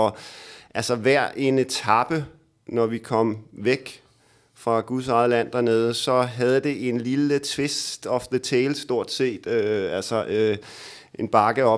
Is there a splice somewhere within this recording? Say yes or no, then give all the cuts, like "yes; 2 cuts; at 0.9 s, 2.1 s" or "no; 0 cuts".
no; 0 cuts